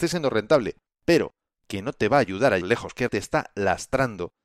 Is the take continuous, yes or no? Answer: no